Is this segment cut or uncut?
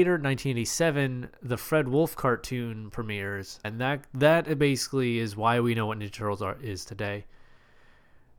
cut